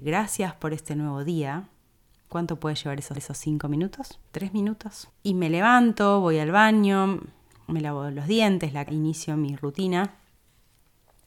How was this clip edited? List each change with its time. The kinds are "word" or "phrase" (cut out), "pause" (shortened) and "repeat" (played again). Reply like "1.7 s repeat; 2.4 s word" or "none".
3.1 s repeat; 4.2 s pause; 8.9 s word